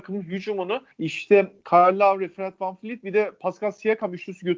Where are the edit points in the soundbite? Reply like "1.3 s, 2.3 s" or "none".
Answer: 0.9 s